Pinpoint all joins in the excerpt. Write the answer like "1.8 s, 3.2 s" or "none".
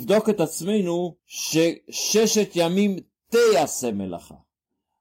1.2 s